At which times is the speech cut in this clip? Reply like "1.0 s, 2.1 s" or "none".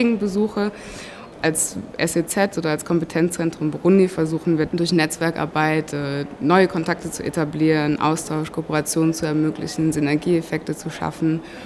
4.7 s